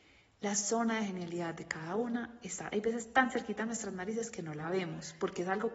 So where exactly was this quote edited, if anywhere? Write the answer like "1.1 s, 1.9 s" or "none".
none